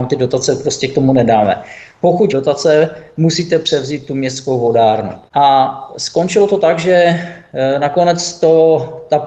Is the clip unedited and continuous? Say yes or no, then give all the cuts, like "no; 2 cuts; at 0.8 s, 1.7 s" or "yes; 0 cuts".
no; 1 cut; at 2.3 s